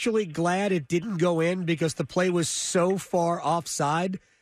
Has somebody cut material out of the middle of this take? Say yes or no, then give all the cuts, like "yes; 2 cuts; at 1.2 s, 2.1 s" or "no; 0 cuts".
no; 0 cuts